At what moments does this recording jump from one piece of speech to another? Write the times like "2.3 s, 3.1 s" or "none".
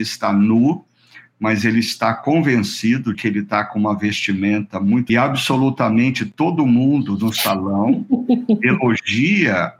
3.1 s, 5.1 s